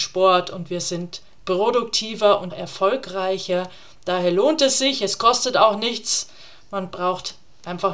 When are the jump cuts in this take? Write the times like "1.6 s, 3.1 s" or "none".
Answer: 2.5 s